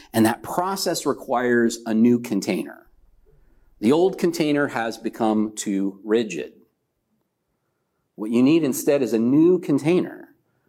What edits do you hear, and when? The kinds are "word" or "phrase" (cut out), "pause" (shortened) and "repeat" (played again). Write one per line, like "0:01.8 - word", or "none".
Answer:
none